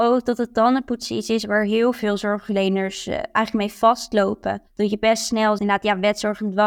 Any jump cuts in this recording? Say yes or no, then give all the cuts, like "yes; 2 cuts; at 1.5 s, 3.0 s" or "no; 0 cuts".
yes; 2 cuts; at 4.7 s, 5.6 s